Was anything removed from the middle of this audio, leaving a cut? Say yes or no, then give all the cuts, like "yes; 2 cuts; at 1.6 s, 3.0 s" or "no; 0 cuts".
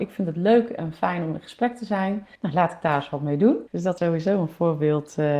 yes; 3 cuts; at 2.3 s, 3.7 s, 4.0 s